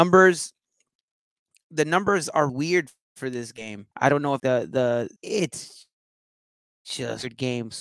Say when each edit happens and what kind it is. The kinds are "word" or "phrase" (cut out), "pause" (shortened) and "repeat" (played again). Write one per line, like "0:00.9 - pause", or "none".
0:02.5 - word
0:03.9 - pause
0:04.4 - phrase
0:05.2 - pause